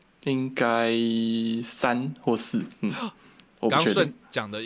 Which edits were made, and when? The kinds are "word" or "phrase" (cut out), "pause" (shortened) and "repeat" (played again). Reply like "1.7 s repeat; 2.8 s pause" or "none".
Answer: none